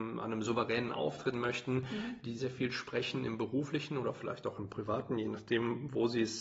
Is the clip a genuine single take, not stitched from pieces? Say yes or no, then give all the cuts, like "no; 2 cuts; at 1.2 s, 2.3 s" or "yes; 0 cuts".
no; 2 cuts; at 1.3 s, 2.4 s